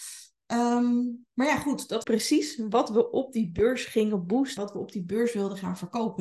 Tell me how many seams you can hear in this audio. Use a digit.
2